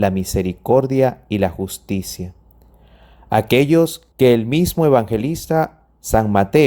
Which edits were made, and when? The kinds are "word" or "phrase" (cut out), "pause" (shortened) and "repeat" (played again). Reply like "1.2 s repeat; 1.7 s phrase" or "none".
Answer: 4.1 s pause